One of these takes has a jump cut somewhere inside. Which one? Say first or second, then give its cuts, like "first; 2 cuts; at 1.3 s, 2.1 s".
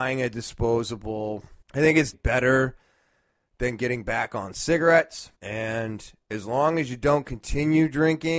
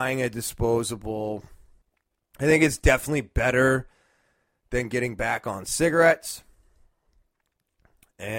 first; 3 cuts; at 1.6 s, 2.1 s, 5.3 s